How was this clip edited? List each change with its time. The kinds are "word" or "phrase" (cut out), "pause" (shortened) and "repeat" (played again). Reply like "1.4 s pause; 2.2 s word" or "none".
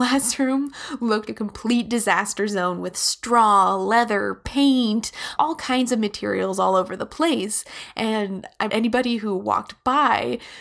1.3 s word; 5.4 s word; 8.7 s word